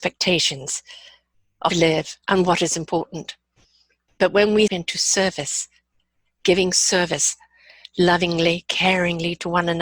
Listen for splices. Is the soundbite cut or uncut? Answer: cut